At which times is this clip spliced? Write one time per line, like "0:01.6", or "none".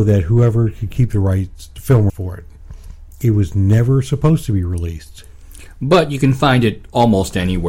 0:02.1